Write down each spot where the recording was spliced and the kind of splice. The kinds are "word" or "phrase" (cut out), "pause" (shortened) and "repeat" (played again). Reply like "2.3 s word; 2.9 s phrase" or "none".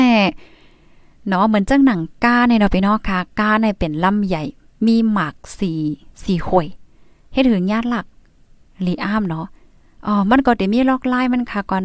none